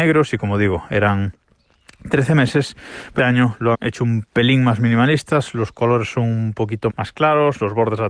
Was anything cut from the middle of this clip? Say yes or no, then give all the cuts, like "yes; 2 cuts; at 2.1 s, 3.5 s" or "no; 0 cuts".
yes; 3 cuts; at 3.2 s, 3.7 s, 6.9 s